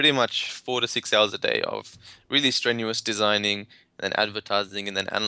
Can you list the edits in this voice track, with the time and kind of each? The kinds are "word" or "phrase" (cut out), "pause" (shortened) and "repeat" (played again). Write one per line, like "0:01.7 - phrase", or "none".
none